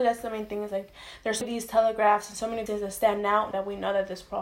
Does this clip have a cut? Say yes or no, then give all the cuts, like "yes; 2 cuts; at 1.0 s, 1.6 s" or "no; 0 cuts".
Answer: yes; 3 cuts; at 1.4 s, 2.7 s, 3.5 s